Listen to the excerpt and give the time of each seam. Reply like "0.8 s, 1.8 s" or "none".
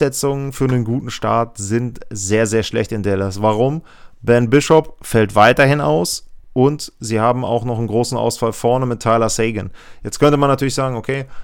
6.4 s